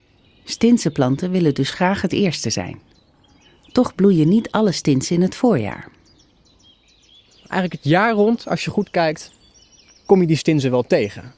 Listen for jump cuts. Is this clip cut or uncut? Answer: uncut